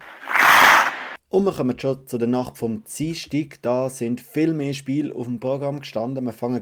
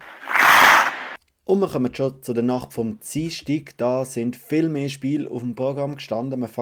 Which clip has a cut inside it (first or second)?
first